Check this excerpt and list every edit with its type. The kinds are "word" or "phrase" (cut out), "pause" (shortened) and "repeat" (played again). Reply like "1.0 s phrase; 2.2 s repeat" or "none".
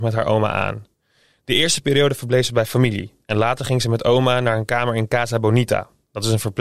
none

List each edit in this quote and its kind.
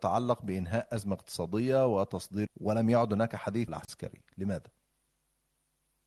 2.5 s word; 3.7 s phrase

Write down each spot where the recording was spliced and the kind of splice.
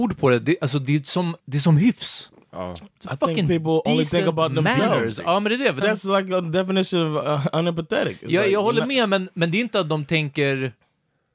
1.4 s pause; 5.8 s phrase

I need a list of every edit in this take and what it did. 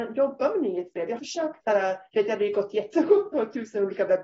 1.2 s word; 1.6 s word

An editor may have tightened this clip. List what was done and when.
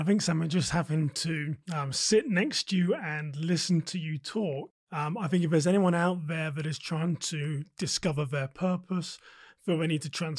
1.6 s pause

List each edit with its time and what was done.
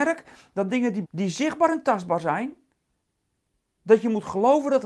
1.0 s word

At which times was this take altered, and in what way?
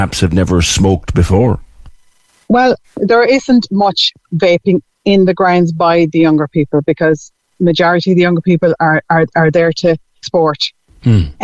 2.8 s pause; 10.2 s phrase

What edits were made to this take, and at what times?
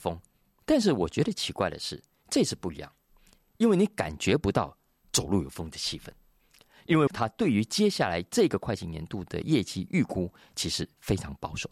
5.0 s word; 7.1 s word

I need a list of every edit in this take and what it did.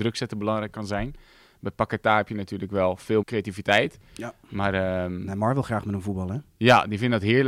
3.2 s word

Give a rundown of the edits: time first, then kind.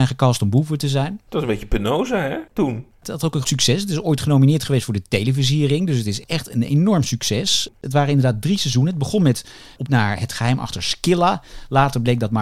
2.5 s pause; 3.4 s word; 9.9 s word

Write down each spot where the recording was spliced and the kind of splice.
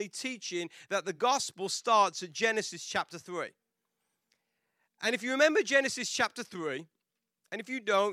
none

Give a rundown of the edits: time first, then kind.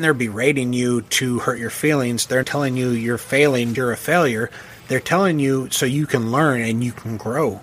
2.4 s phrase; 3.7 s word

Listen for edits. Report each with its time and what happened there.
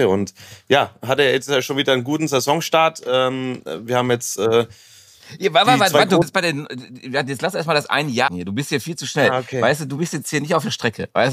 6.2 s word; 8.3 s word

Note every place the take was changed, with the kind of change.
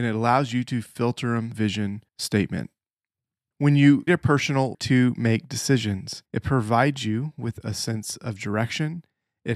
1.5 s phrase; 2.1 s pause; 4.1 s word; 4.7 s phrase; 6.3 s pause

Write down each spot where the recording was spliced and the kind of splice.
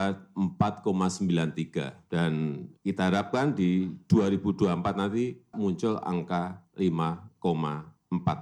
2.8 s pause; 5.5 s word

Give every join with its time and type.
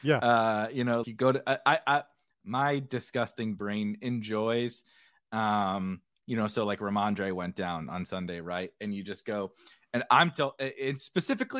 1.0 s word

